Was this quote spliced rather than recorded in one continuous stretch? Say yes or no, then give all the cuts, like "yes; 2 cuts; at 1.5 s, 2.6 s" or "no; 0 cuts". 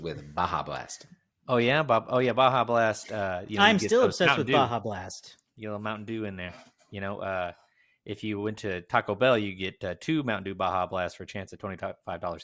no; 0 cuts